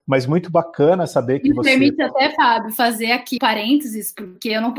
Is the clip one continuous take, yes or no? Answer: no